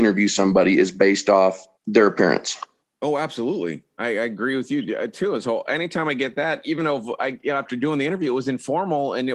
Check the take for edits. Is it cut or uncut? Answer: cut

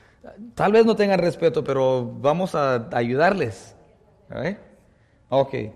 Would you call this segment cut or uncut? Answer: uncut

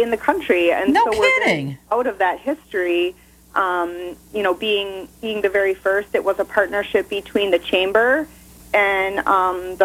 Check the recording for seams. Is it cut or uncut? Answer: uncut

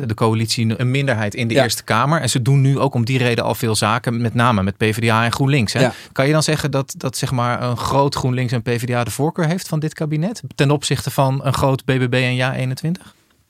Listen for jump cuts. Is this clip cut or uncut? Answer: uncut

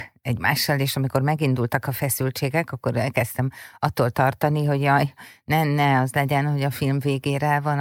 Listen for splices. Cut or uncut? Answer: uncut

